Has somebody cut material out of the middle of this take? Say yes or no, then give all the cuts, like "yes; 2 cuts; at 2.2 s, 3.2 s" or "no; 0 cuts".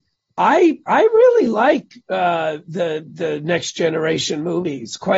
no; 0 cuts